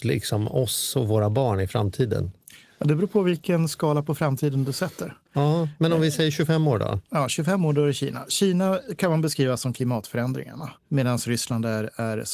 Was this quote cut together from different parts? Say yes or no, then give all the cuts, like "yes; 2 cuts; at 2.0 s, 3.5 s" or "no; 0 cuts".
yes; 1 cut; at 10.8 s